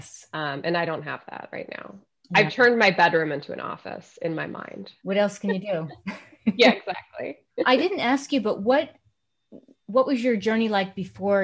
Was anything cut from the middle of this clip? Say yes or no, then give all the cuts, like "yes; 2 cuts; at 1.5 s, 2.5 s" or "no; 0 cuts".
no; 0 cuts